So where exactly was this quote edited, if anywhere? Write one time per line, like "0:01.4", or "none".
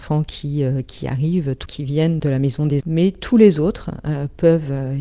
0:01.7
0:02.2
0:02.8